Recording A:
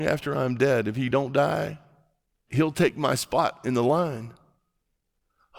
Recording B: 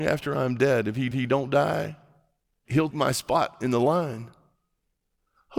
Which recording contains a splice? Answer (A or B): B